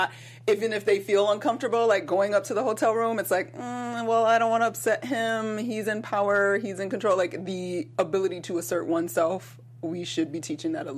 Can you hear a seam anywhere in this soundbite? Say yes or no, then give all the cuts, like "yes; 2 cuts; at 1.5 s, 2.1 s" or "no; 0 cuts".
no; 0 cuts